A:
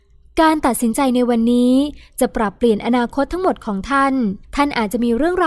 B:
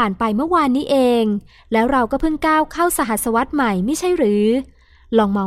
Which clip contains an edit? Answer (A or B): A